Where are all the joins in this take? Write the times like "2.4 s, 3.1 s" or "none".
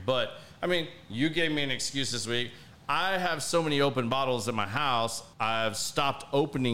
5.3 s